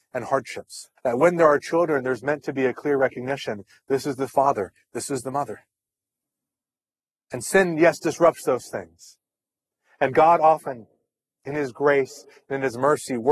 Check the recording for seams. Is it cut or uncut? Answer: cut